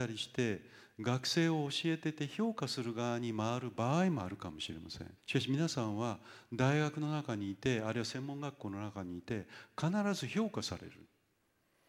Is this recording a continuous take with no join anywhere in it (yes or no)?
no